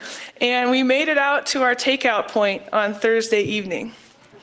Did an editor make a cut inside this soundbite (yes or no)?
no